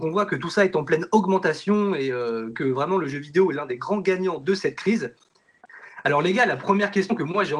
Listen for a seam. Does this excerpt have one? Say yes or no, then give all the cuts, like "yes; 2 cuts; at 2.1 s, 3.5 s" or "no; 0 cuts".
no; 0 cuts